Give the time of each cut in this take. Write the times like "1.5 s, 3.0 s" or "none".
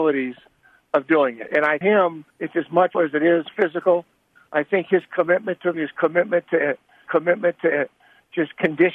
1.8 s, 2.3 s, 2.9 s, 5.7 s, 7.0 s